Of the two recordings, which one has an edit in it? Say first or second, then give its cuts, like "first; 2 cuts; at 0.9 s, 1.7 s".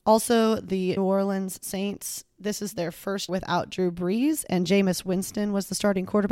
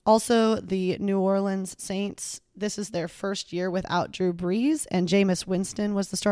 first; 2 cuts; at 1.0 s, 3.3 s